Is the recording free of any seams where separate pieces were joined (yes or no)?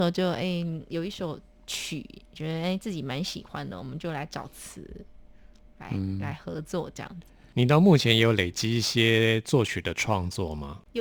yes